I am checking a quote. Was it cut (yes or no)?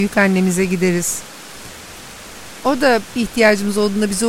no